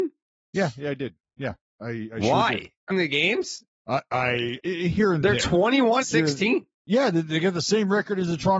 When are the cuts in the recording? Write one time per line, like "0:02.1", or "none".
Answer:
0:02.9
0:04.6
0:06.0
0:06.7